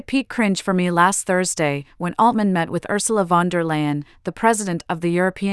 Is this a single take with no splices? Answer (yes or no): yes